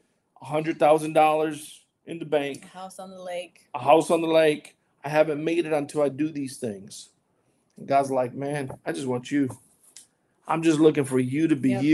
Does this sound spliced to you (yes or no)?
no